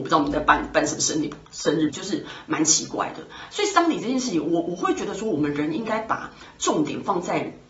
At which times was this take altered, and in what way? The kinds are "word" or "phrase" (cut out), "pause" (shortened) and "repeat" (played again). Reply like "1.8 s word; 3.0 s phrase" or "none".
1.9 s word